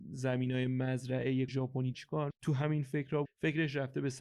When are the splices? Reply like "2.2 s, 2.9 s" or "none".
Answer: 1.5 s, 1.9 s, 2.3 s, 3.2 s

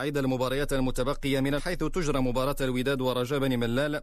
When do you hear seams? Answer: 1.6 s

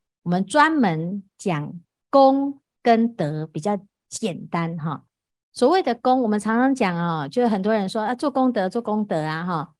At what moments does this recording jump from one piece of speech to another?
none

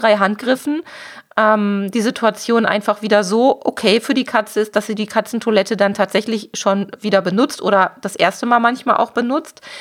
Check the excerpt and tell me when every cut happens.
none

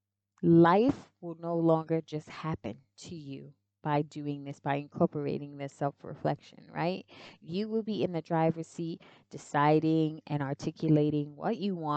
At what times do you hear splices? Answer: none

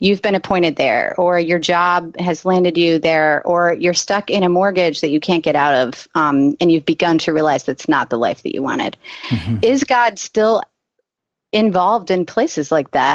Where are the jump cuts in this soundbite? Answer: none

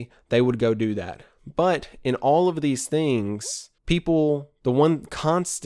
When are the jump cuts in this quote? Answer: 3.8 s

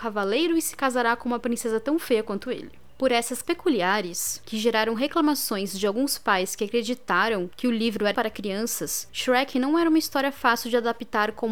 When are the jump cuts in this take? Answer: 3.4 s, 8.1 s

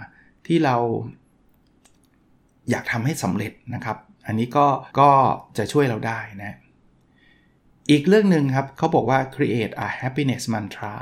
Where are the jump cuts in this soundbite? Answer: 4.9 s

